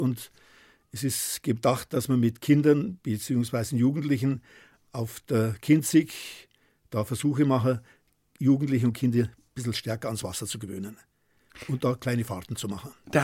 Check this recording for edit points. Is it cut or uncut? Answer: uncut